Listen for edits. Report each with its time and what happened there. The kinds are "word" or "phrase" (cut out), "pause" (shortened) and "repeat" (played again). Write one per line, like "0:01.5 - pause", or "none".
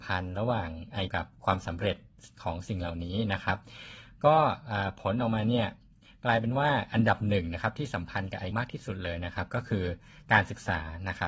0:01.1 - word
0:08.5 - word